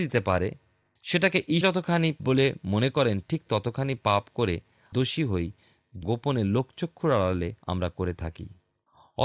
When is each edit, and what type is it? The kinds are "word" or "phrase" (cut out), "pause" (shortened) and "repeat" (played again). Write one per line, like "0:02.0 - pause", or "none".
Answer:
0:01.6 - word
0:02.2 - word
0:04.9 - word
0:06.0 - phrase
0:07.6 - pause